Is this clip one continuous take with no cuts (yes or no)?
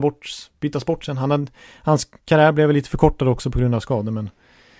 yes